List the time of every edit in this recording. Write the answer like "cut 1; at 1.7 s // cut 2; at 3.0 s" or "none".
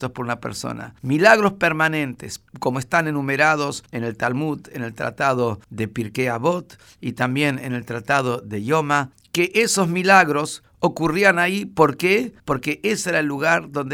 none